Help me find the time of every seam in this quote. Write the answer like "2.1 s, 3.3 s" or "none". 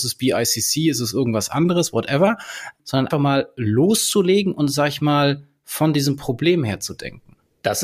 3.1 s